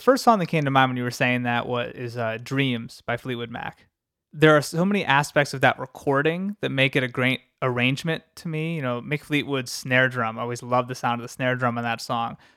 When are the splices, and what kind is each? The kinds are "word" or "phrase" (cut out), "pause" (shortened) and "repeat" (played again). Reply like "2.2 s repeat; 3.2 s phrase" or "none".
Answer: none